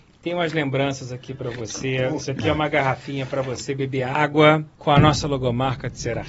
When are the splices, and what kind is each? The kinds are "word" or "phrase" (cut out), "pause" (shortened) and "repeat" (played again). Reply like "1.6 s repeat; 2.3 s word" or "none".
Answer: 4.7 s pause